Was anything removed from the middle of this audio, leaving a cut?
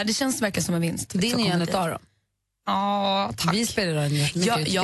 no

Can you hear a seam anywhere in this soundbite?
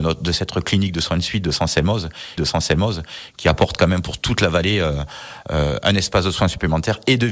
yes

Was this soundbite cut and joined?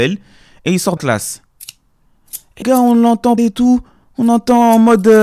yes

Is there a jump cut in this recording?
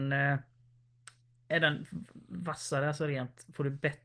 no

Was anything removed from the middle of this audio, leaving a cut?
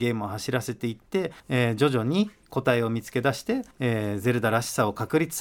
yes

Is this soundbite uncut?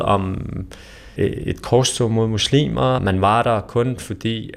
no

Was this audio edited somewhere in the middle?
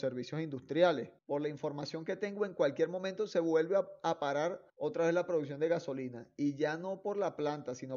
yes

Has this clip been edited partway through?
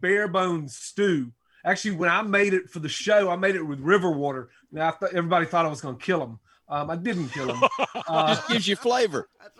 no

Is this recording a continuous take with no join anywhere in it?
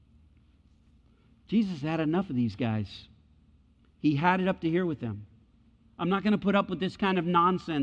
yes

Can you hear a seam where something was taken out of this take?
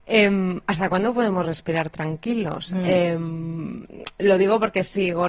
no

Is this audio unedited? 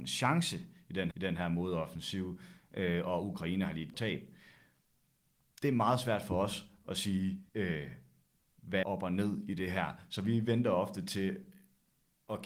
no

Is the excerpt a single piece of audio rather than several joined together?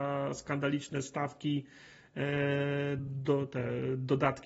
no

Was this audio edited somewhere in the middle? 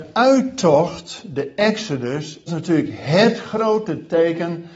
yes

